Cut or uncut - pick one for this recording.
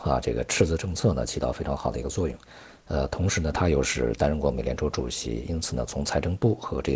uncut